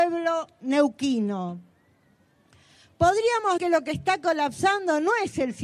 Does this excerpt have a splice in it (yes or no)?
yes